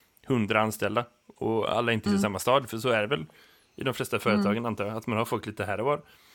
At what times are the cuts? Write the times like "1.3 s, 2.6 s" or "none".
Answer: 2.1 s